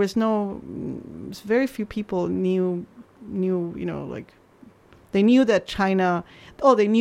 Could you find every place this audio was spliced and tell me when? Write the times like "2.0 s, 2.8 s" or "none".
none